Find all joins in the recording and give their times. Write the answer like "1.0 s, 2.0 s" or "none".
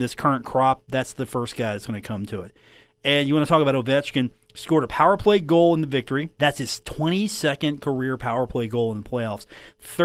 none